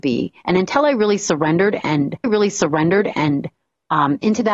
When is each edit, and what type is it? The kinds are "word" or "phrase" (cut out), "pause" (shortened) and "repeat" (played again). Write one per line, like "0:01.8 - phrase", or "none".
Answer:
0:02.2 - repeat